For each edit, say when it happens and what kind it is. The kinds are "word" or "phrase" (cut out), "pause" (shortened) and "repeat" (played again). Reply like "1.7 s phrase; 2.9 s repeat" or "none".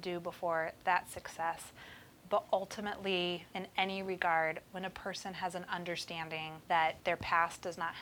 3.5 s pause